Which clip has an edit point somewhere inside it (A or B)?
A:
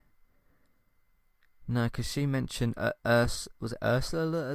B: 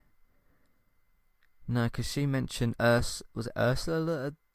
B